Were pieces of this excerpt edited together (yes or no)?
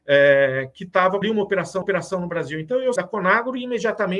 yes